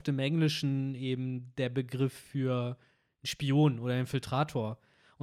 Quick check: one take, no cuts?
yes; 0 cuts

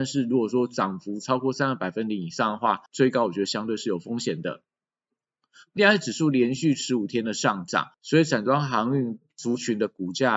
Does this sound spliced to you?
yes; 3 cuts; at 2.9 s, 5.8 s, 7.9 s

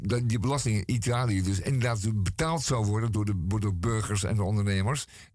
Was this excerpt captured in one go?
yes; 0 cuts

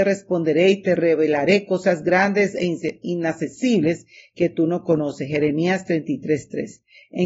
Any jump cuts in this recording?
no; 0 cuts

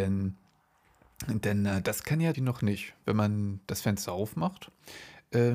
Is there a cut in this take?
yes; 1 cut; at 2.3 s

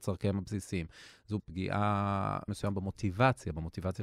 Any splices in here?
yes; 2 cuts; at 1.4 s, 2.5 s

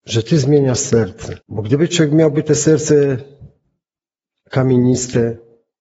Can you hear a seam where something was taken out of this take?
yes; 1 cut; at 1.4 s

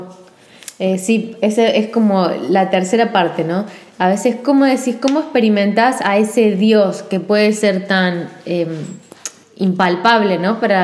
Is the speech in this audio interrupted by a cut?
no; 0 cuts

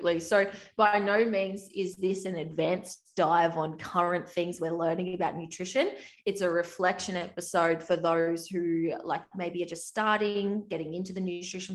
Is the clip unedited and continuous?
yes; 0 cuts

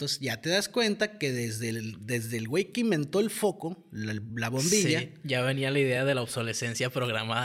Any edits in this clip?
no; 0 cuts

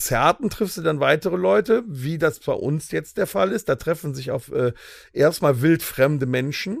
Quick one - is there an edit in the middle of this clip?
no; 0 cuts

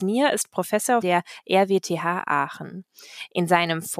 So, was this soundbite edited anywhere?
yes; 1 cut; at 1.0 s

